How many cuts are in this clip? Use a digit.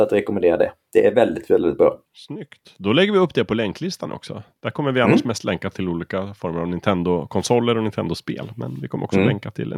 1